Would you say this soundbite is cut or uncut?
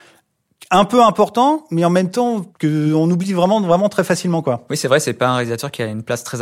uncut